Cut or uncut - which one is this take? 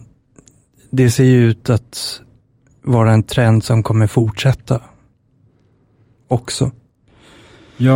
uncut